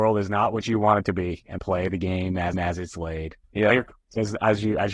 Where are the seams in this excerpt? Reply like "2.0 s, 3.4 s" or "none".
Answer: 1.6 s, 2.5 s, 3.4 s